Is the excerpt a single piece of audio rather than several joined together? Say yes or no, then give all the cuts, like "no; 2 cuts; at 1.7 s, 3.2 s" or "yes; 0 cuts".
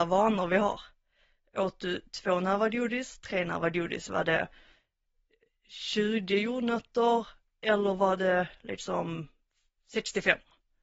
yes; 0 cuts